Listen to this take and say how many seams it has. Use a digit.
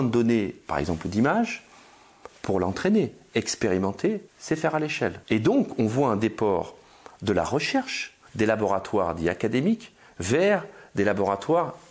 3